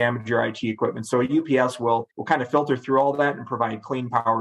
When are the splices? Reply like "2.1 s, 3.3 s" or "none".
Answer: 2.1 s